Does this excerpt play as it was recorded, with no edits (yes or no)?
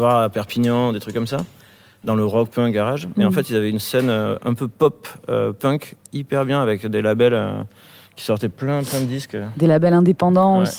yes